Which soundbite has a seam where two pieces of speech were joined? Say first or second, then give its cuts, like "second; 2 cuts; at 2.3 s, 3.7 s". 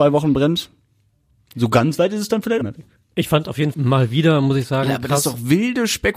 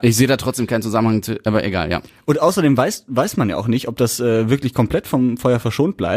first; 2 cuts; at 2.6 s, 3.7 s